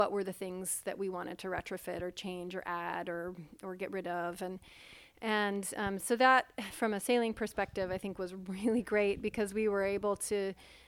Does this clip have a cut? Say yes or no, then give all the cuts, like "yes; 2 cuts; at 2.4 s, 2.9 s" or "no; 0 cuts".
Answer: no; 0 cuts